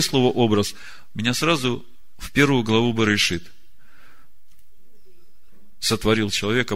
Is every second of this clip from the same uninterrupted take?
yes; 0 cuts

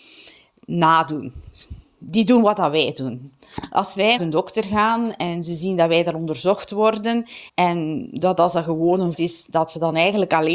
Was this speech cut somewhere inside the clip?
yes; 3 cuts; at 4.2 s, 7.5 s, 9.1 s

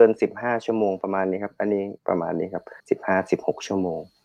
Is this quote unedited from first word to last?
no; 2 cuts; at 2.0 s, 2.8 s

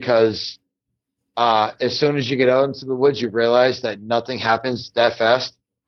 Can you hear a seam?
no; 0 cuts

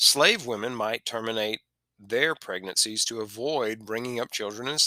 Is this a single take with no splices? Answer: yes; 0 cuts

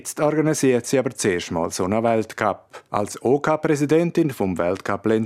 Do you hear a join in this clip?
yes; 1 cut; at 2.9 s

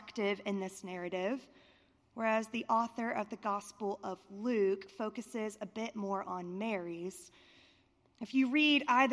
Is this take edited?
no; 0 cuts

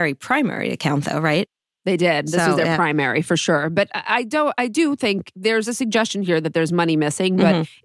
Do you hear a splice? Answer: no; 0 cuts

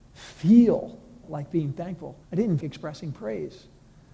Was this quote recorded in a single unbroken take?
no; 3 cuts; at 1.2 s, 2.2 s, 2.6 s

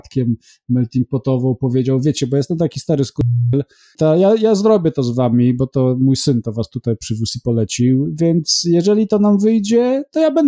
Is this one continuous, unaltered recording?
yes; 0 cuts

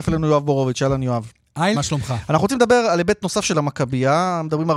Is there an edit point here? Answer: yes; 1 cut; at 1.7 s

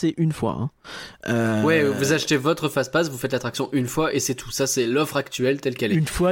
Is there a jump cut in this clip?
no; 0 cuts

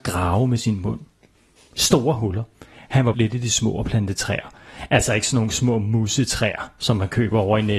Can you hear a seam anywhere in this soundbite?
yes; 1 cut; at 3.1 s

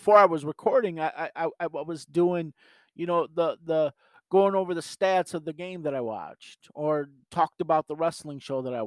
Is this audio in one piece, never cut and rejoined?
yes; 0 cuts

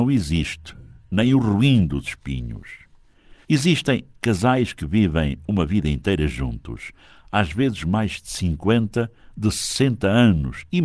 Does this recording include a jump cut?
yes; 1 cut; at 3.4 s

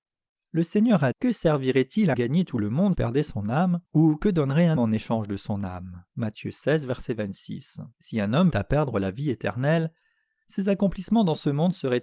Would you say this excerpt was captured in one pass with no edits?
no; 8 cuts; at 1.1 s, 2.1 s, 2.9 s, 3.9 s, 4.8 s, 6.1 s, 7.9 s, 8.5 s

